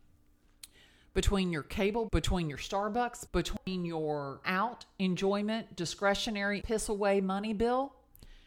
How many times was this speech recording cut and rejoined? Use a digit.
4